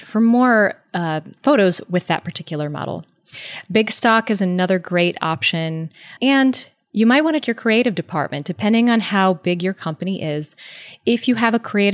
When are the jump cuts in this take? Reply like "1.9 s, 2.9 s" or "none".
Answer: 6.2 s, 7.4 s